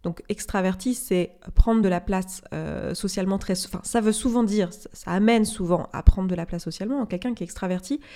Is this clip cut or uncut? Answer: uncut